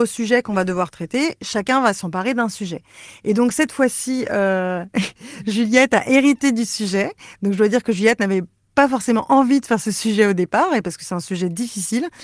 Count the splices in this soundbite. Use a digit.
0